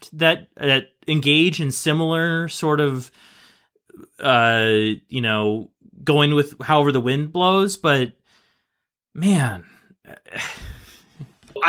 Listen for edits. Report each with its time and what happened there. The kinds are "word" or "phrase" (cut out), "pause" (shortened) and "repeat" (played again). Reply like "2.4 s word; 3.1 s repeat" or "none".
none